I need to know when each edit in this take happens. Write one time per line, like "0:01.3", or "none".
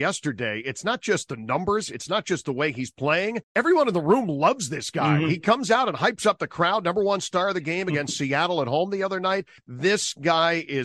0:03.4